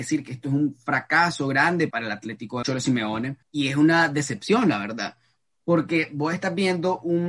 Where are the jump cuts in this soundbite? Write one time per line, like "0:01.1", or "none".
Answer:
0:01.9
0:02.6
0:03.4